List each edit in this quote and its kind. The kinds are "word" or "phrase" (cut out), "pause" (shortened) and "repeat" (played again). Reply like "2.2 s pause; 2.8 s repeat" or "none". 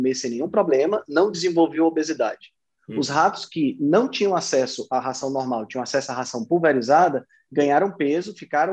none